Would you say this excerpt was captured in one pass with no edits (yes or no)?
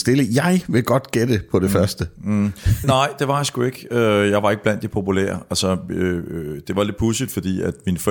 no